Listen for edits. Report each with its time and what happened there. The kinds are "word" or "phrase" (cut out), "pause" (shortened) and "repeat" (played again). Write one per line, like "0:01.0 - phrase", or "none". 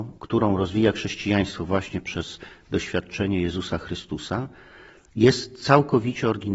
none